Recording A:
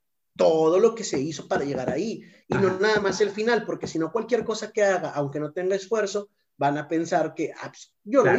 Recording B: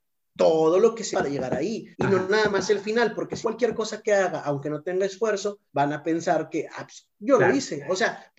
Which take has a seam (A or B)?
B